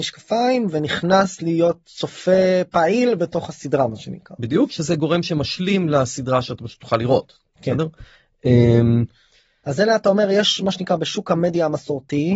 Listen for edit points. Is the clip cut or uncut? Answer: uncut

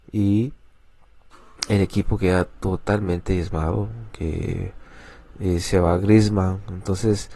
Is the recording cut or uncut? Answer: uncut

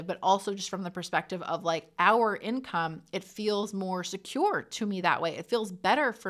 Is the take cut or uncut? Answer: uncut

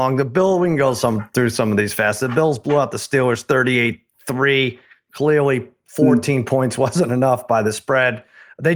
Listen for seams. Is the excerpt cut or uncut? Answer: uncut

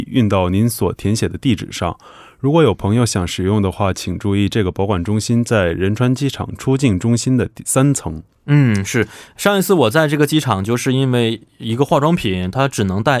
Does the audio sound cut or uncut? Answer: uncut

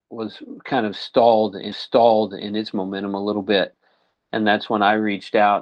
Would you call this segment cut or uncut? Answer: cut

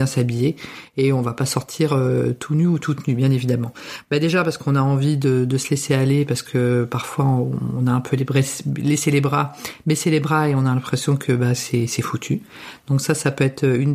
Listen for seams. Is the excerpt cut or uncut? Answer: uncut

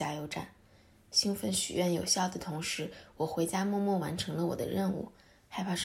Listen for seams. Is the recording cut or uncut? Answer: uncut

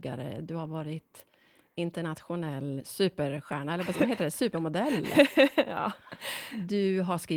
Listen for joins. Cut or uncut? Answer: cut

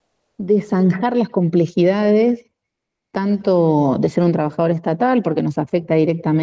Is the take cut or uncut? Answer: uncut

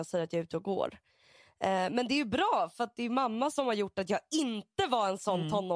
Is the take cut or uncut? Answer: uncut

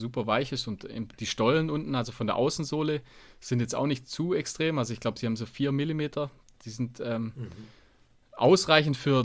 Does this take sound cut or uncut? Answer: uncut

